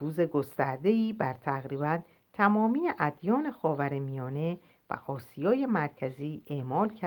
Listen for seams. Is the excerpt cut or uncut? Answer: uncut